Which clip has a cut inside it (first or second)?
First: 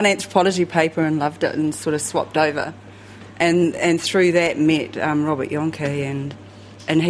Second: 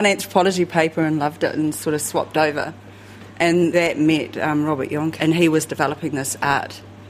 second